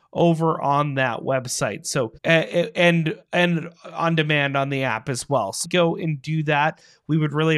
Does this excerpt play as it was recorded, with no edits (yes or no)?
no